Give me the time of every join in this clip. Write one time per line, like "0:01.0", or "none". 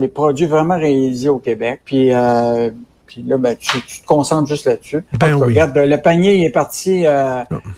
0:01.8
0:05.1